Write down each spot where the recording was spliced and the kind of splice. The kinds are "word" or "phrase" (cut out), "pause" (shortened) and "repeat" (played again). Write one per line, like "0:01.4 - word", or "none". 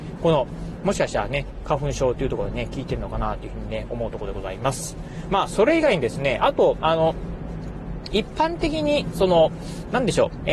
0:08.1 - phrase